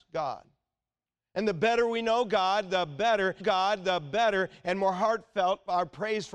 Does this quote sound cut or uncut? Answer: cut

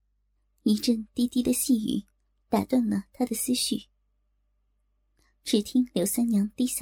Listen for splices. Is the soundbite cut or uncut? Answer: uncut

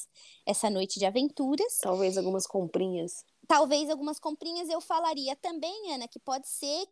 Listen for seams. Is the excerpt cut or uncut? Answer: uncut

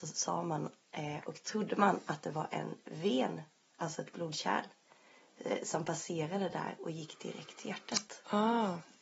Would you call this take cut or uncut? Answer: uncut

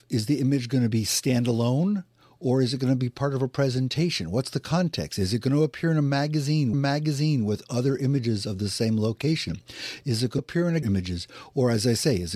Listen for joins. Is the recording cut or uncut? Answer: cut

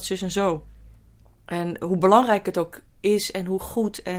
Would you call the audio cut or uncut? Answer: uncut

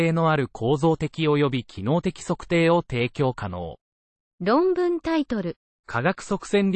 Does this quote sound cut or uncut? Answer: cut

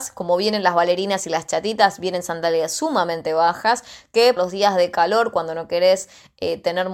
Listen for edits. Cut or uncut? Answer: cut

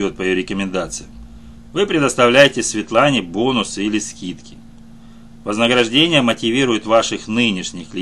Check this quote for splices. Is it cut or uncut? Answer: uncut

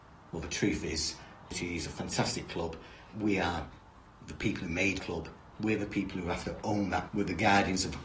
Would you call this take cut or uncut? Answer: cut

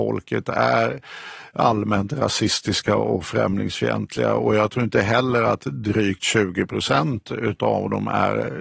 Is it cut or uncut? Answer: uncut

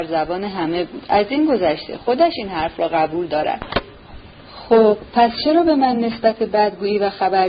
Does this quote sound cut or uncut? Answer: uncut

